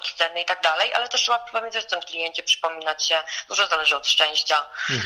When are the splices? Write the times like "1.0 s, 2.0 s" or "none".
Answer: none